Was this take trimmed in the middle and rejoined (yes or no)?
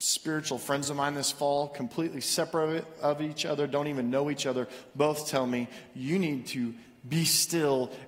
no